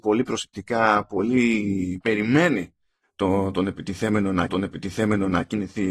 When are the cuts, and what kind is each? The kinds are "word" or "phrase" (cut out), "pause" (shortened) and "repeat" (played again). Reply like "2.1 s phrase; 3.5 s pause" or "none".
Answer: 2.0 s phrase; 4.5 s repeat